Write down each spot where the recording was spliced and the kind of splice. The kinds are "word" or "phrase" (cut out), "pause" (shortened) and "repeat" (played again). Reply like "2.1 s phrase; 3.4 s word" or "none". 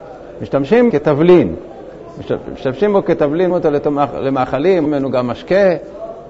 0.9 s word; 3.5 s word; 4.9 s word